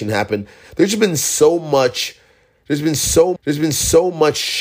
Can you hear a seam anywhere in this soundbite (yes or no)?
yes